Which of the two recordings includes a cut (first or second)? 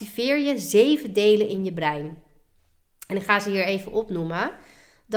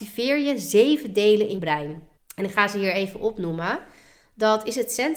second